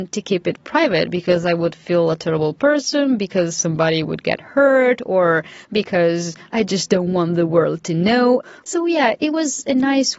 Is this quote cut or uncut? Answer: uncut